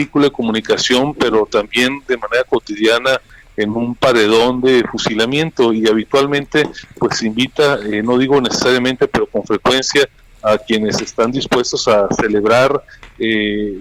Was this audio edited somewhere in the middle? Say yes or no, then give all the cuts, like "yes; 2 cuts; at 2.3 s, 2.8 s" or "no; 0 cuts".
no; 0 cuts